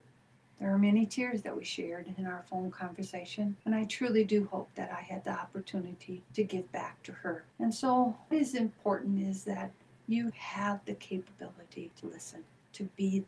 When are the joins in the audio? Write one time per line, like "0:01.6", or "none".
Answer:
0:03.6
0:07.5
0:08.3
0:10.3
0:12.0